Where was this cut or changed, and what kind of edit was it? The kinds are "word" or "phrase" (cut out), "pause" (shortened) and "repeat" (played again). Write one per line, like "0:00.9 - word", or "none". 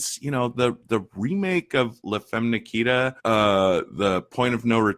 0:03.2 - pause